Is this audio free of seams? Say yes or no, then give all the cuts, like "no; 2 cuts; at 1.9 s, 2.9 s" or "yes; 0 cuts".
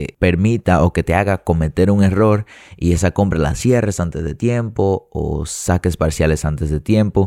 yes; 0 cuts